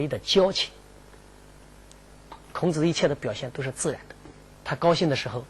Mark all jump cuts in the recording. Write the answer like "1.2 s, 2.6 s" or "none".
4.4 s